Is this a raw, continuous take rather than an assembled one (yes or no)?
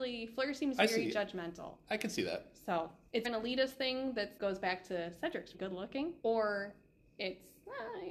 no